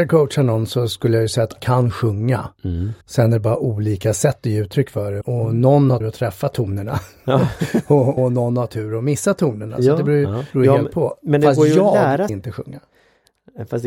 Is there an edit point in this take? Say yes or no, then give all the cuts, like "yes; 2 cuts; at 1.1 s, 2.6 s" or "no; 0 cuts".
yes; 7 cuts; at 1.6 s, 3.0 s, 5.2 s, 6.0 s, 8.2 s, 10.5 s, 12.3 s